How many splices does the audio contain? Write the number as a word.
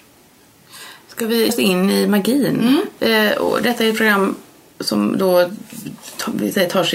one